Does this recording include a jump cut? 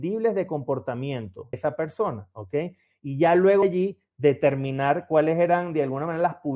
yes; 2 cuts; at 1.5 s, 3.6 s

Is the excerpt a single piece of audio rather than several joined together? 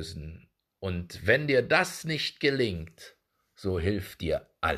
yes; 0 cuts

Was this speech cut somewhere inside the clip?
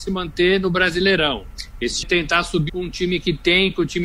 yes; 2 cuts; at 2.0 s, 2.7 s

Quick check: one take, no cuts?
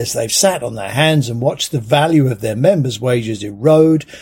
yes; 0 cuts

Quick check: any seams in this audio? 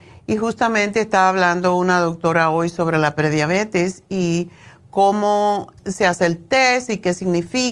yes; 1 cut; at 5.8 s

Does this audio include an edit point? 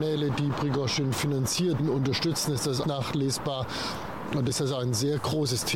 yes; 3 cuts; at 1.8 s, 2.8 s, 4.5 s

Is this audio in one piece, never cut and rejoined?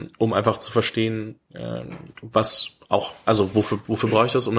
yes; 0 cuts

